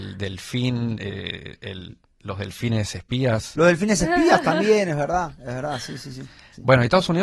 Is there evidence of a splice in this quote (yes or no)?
no